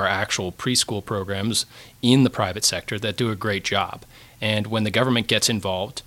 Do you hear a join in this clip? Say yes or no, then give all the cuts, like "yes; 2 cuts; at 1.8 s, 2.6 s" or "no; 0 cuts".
no; 0 cuts